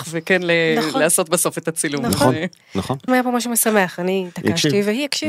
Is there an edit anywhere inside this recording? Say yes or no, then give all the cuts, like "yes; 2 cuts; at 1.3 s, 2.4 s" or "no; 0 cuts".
yes; 1 cut; at 3.1 s